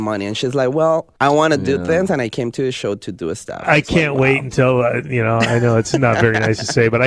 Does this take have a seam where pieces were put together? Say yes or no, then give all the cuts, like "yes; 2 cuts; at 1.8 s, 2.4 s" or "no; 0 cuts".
yes; 1 cut; at 1.2 s